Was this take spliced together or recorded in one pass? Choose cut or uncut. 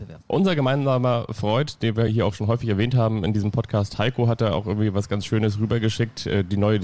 uncut